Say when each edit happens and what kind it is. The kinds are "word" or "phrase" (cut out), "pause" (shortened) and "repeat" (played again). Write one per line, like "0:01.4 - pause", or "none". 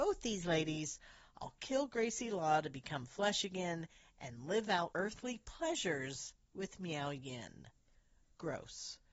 0:04.9 - word